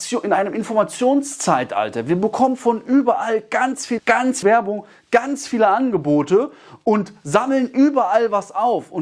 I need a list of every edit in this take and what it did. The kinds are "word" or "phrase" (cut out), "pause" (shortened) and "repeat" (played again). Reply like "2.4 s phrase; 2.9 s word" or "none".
4.0 s word; 4.4 s phrase

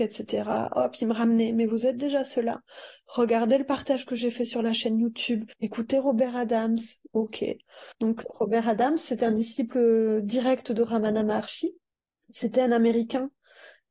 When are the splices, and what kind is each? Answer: 5.5 s pause; 7.9 s pause; 11.9 s pause

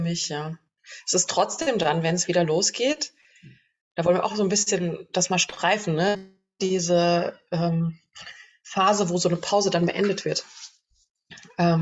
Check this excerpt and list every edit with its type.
none

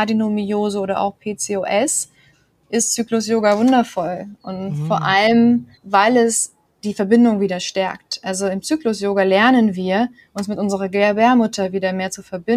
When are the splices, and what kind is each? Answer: 5.8 s pause; 6.7 s pause

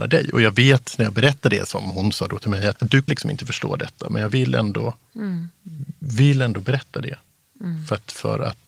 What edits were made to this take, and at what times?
2.7 s word; 3.1 s word

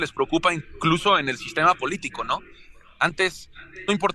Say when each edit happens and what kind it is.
none

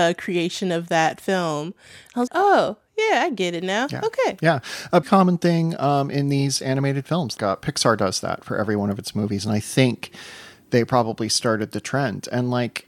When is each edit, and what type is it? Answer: 2.3 s word; 5.0 s word; 7.4 s word

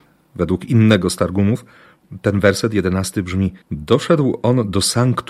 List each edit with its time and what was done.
3.6 s pause

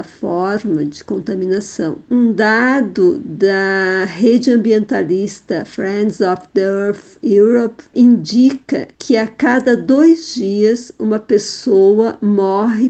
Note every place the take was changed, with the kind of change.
8.9 s pause

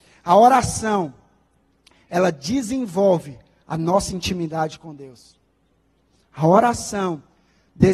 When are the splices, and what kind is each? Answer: none

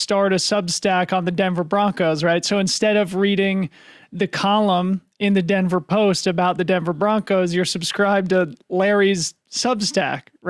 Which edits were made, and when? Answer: none

